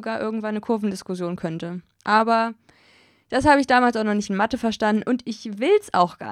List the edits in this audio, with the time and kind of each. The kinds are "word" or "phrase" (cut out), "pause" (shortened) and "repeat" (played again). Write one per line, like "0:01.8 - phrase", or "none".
none